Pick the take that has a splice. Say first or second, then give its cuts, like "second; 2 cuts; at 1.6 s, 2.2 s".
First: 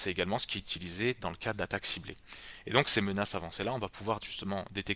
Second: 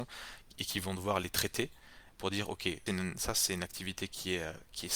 second; 1 cut; at 2.9 s